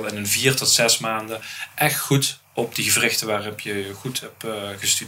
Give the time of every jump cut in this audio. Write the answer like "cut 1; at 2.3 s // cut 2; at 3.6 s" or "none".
cut 1; at 2.4 s